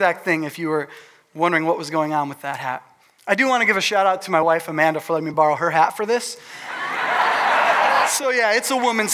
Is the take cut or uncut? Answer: uncut